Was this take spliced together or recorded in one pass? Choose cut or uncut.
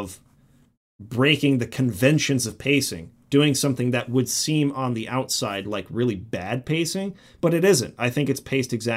uncut